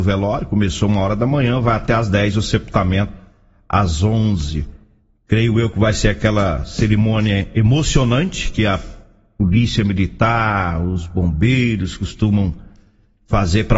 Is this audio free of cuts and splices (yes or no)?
yes